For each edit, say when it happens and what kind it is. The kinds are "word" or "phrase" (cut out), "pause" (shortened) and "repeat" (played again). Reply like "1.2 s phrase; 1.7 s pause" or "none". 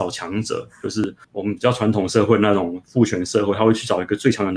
1.2 s pause